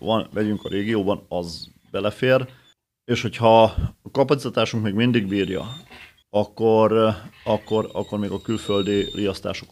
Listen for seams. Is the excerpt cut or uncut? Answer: uncut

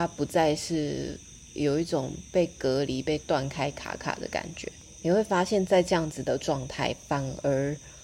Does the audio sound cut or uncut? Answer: uncut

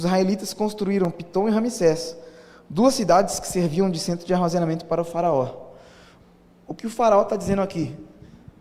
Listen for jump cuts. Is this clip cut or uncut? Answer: uncut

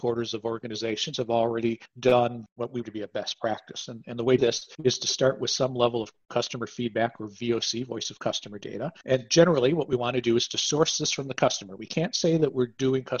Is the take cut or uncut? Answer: cut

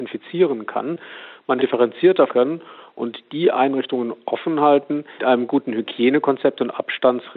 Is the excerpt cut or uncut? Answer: cut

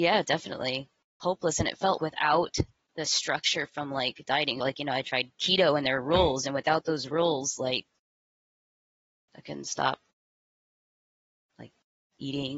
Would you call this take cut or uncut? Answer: cut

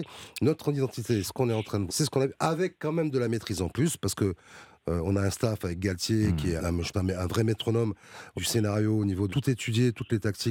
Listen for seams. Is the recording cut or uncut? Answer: cut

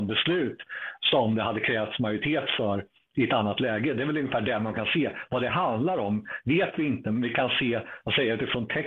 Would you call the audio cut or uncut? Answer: uncut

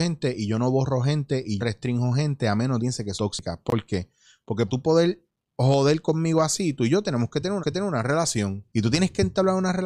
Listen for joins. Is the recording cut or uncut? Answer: cut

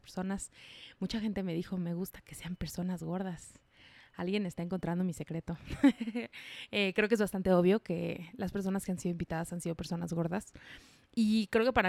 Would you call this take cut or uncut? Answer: uncut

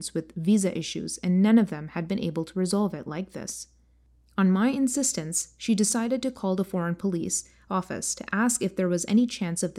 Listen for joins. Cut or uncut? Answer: uncut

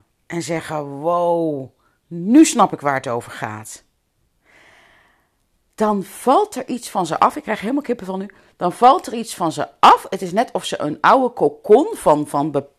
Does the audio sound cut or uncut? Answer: uncut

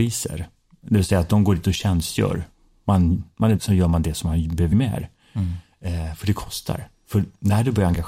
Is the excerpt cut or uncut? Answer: cut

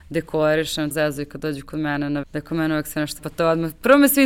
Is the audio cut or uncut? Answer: cut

